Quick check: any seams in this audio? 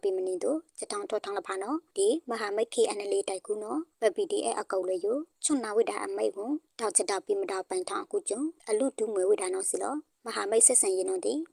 yes; 1 cut; at 8.6 s

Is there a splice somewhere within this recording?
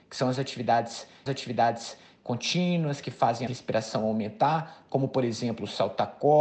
yes; 2 cuts; at 1.3 s, 3.5 s

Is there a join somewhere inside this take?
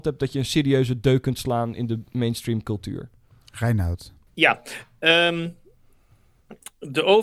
no; 0 cuts

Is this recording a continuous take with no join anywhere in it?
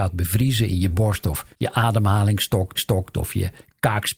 no; 3 cuts; at 0.9 s, 1.5 s, 2.8 s

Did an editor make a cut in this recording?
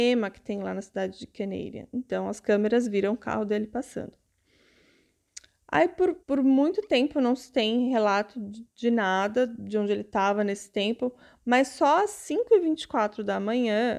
yes; 1 cut; at 6.2 s

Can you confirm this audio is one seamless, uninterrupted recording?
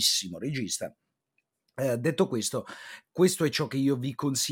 yes; 0 cuts

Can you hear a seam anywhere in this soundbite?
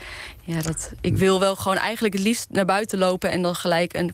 no; 0 cuts

